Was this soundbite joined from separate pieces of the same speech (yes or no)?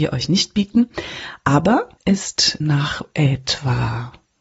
yes